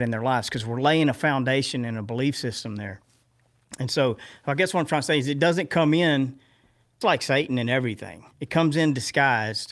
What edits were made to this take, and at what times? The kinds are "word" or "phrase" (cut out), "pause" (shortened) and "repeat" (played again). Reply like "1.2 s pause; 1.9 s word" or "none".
7.0 s word; 8.3 s pause